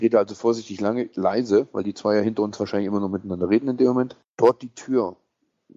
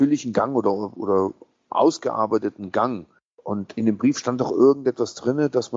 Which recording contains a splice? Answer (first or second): first